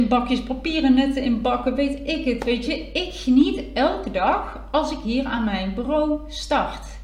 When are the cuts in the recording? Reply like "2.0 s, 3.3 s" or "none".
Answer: none

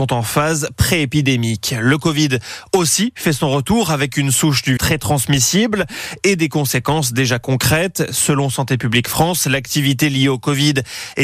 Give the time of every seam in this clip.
4.8 s

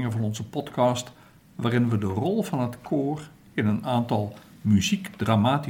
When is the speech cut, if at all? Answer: none

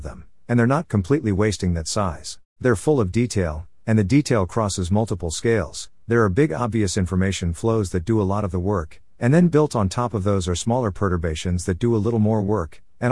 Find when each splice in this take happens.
2.5 s

